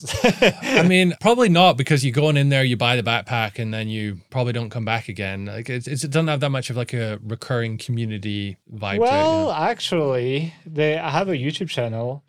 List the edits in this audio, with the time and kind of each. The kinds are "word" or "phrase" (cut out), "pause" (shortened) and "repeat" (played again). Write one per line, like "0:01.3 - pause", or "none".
0:08.6 - pause